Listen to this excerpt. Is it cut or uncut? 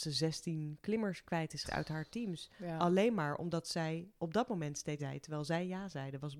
cut